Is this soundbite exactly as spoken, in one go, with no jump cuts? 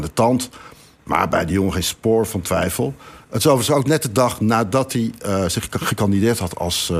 yes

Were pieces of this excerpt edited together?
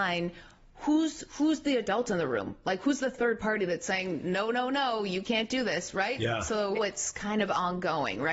yes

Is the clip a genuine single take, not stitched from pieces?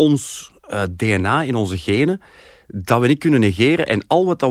yes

